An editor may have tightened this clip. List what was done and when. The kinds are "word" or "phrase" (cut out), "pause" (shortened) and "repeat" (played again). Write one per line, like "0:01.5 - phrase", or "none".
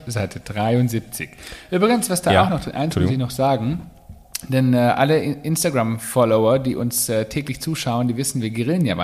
none